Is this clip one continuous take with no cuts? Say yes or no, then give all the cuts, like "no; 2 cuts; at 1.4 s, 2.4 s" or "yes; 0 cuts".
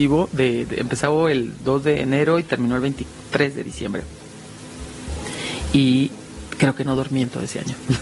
yes; 0 cuts